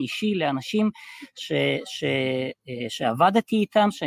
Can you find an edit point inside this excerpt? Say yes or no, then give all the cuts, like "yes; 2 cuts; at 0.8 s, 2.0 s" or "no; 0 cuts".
no; 0 cuts